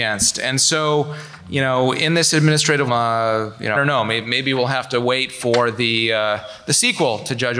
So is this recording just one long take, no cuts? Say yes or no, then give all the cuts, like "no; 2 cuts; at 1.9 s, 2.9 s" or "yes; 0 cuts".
no; 2 cuts; at 2.9 s, 3.7 s